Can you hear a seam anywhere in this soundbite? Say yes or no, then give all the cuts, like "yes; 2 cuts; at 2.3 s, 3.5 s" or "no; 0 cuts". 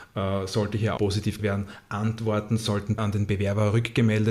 yes; 3 cuts; at 1.0 s, 1.4 s, 3.0 s